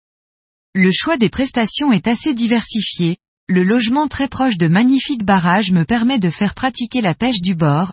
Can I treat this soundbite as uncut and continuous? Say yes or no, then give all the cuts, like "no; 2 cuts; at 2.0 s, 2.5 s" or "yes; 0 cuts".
yes; 0 cuts